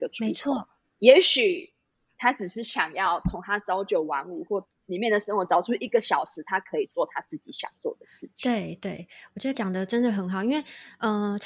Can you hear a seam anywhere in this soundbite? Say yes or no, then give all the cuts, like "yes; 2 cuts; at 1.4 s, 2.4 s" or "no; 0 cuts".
yes; 1 cut; at 9.5 s